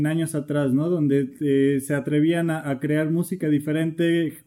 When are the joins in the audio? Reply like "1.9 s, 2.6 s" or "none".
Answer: none